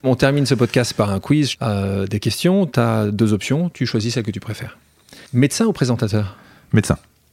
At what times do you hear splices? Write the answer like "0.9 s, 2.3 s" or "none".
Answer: 1.5 s, 5.3 s